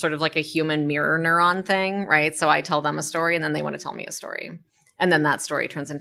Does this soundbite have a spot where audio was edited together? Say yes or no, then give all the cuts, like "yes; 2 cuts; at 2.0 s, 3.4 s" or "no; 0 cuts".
no; 0 cuts